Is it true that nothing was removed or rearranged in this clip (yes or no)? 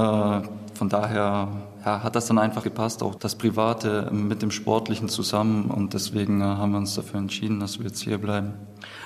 no